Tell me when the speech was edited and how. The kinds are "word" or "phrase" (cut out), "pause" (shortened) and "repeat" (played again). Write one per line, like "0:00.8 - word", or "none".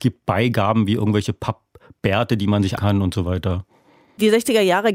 0:02.8 - word

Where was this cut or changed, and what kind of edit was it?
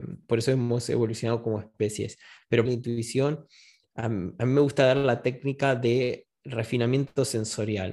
0:02.7 - phrase

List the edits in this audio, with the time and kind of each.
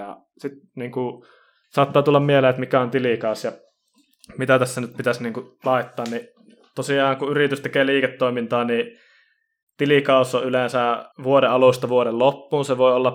0:11.1 - pause

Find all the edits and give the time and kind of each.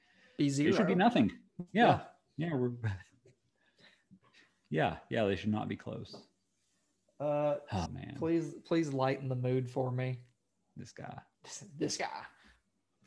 0:07.9 - word
0:11.3 - pause

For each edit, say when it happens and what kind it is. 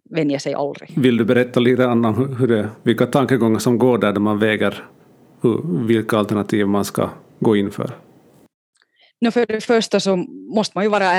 none

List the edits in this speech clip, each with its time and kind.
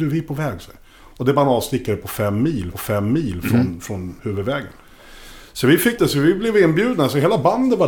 0:02.7 - repeat
0:04.2 - pause
0:06.0 - word

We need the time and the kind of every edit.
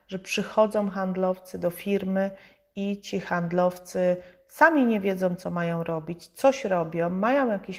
none

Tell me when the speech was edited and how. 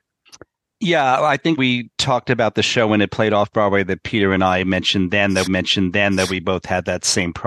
0:01.6 - word
0:05.5 - repeat

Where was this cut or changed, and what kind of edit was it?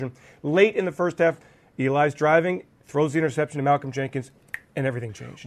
none

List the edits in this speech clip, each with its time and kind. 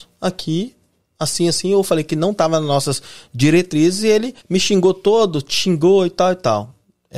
0:04.4 - pause

